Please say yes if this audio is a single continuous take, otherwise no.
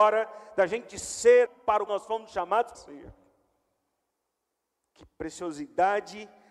no